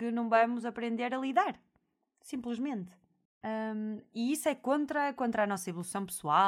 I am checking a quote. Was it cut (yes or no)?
no